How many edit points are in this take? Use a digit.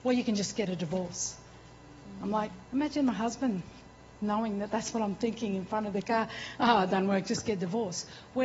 0